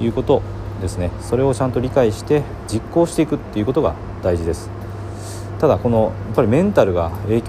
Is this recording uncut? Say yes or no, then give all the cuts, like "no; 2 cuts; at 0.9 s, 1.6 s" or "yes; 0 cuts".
no; 1 cut; at 2.7 s